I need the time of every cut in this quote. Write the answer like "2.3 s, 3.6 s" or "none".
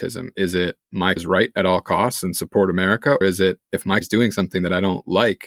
1.2 s, 3.2 s, 4.0 s